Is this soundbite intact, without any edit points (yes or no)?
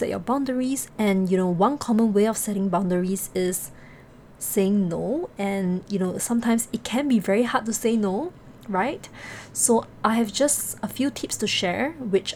yes